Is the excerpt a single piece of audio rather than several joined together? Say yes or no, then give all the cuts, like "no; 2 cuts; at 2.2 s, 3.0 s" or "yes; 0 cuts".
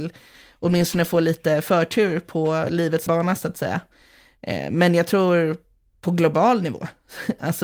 no; 1 cut; at 3.1 s